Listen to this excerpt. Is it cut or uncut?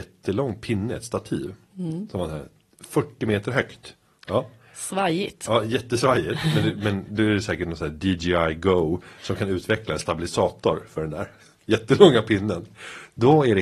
uncut